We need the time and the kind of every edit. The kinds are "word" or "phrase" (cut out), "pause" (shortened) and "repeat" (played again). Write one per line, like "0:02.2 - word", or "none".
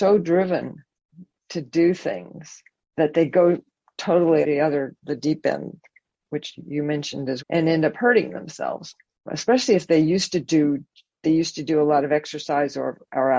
0:04.4 - word
0:07.4 - word
0:09.3 - word